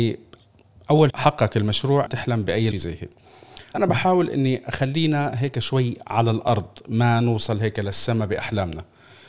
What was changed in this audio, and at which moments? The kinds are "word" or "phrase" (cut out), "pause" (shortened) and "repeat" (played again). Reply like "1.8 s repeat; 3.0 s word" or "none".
1.1 s word; 2.1 s word; 2.7 s phrase; 3.7 s word